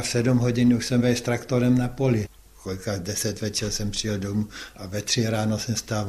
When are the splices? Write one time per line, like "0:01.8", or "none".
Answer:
0:01.0